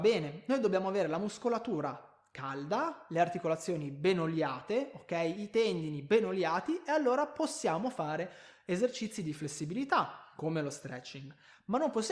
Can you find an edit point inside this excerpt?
no; 0 cuts

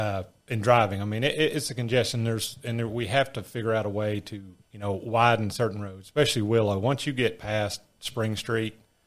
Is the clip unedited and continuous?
no; 1 cut; at 4.6 s

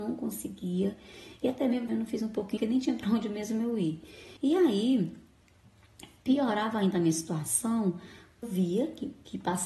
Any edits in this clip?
yes; 4 cuts; at 1.9 s, 2.6 s, 4.4 s, 8.4 s

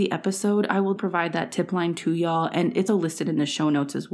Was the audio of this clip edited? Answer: yes; 2 cuts; at 1.0 s, 2.9 s

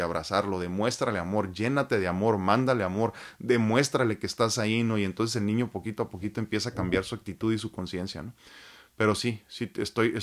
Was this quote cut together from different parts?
no; 0 cuts

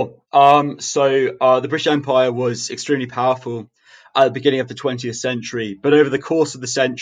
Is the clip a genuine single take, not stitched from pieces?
yes; 0 cuts

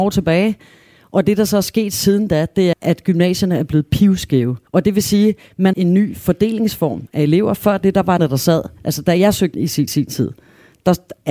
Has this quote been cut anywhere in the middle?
yes; 6 cuts; at 2.7 s, 4.7 s, 5.7 s, 8.2 s, 9.5 s, 9.9 s

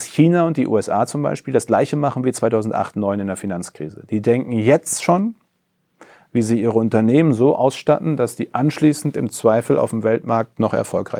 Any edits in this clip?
no; 0 cuts

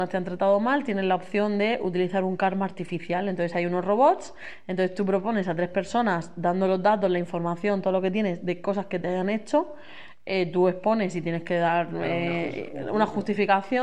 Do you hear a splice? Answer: no; 0 cuts

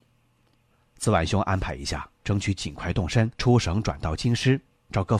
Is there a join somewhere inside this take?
yes; 1 cut; at 3.3 s

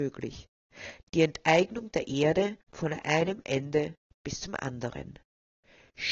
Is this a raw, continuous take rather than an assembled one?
no; 1 cut; at 2.6 s

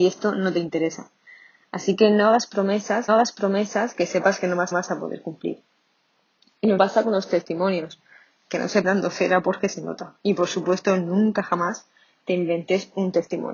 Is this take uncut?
no; 5 cuts; at 3.1 s, 4.7 s, 6.8 s, 8.8 s, 10.2 s

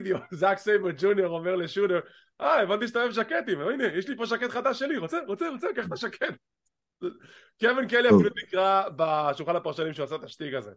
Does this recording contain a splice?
no; 0 cuts

